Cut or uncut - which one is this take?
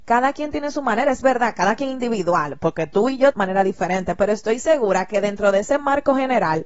cut